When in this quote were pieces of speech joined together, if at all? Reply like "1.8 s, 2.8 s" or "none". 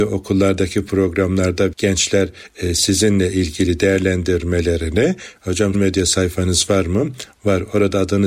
1.7 s, 5.4 s, 5.7 s